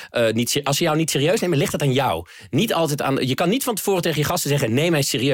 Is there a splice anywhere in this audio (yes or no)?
no